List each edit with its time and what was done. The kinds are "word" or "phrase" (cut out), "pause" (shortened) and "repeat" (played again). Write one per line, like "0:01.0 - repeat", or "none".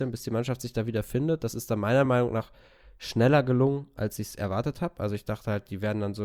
none